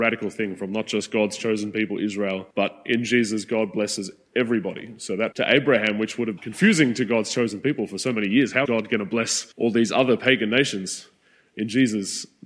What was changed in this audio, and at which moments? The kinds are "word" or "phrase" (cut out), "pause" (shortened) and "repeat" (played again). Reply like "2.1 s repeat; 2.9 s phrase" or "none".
2.5 s pause; 5.3 s word; 6.4 s word; 8.6 s word; 9.5 s pause

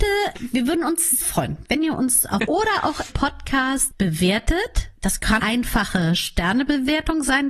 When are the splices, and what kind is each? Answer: 1.2 s word; 2.4 s word; 3.1 s word; 4.9 s pause; 5.4 s word

